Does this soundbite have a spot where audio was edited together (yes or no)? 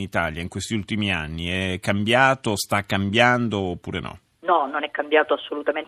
no